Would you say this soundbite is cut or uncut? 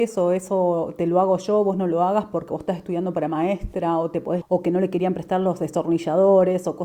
cut